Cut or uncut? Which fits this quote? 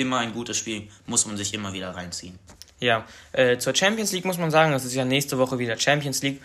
uncut